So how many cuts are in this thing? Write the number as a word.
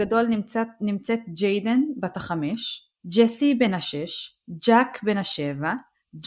one